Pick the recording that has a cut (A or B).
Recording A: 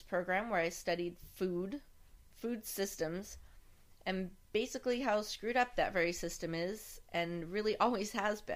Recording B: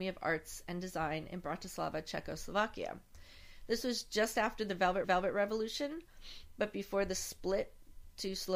B